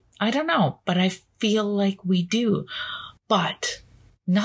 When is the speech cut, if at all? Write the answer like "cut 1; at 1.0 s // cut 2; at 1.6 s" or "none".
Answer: cut 1; at 3.2 s